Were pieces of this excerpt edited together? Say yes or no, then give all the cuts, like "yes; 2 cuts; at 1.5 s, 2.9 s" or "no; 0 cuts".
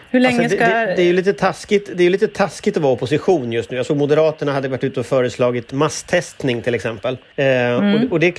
yes; 1 cut; at 7.3 s